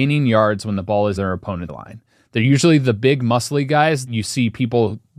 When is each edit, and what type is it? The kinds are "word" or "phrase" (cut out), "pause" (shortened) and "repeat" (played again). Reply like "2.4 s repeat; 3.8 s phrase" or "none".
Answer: 1.2 s word; 1.7 s word; 4.1 s word

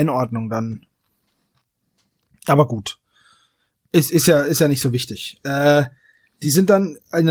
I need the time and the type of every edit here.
none

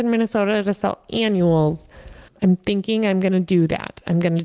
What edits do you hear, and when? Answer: none

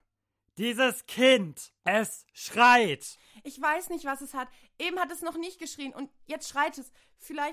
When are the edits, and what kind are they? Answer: 1.8 s pause

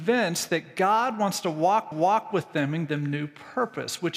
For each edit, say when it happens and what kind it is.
1.9 s repeat; 2.9 s word

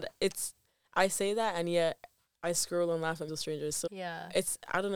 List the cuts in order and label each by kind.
3.3 s word; 3.9 s word

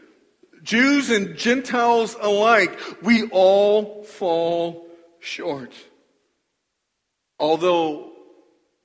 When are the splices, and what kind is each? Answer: none

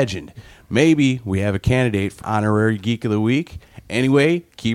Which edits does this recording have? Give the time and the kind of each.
2.2 s word

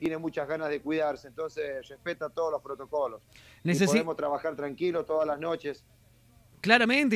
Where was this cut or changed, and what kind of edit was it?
none

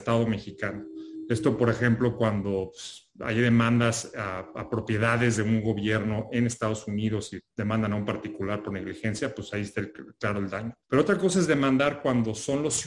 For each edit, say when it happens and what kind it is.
10.8 s pause

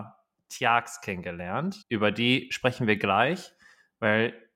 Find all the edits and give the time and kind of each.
1.8 s pause

